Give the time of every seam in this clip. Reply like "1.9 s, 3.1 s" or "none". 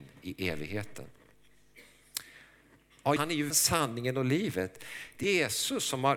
3.2 s, 3.5 s, 5.2 s